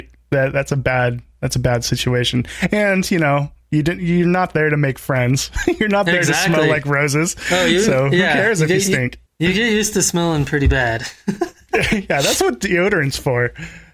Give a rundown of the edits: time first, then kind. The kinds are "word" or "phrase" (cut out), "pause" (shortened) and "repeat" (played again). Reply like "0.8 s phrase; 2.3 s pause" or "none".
none